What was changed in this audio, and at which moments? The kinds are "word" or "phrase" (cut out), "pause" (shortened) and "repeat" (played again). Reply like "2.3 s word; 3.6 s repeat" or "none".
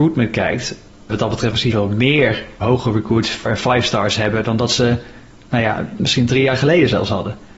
1.1 s word; 1.7 s word; 2.6 s word; 3.5 s word